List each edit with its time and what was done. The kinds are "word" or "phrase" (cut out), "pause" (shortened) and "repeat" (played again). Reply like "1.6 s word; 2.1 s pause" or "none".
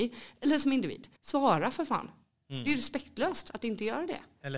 1.2 s pause